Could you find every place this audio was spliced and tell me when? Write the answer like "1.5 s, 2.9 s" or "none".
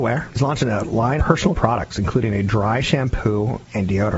1.2 s, 1.5 s